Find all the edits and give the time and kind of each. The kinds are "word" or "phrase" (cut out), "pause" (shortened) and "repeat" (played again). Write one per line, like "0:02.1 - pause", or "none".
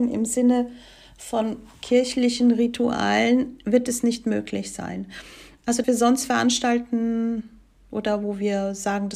0:05.8 - phrase